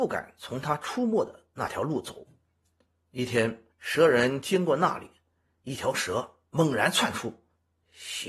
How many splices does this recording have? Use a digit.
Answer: 1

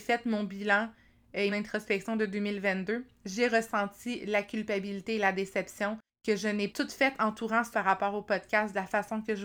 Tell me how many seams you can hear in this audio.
3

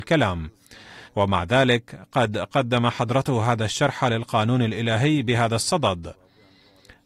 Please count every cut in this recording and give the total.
1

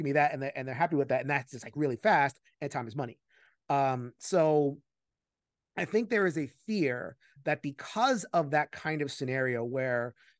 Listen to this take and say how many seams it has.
0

